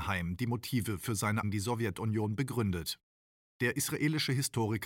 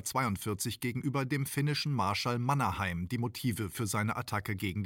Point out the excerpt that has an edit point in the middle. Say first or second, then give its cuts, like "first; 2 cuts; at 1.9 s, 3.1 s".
first; 1 cut; at 1.4 s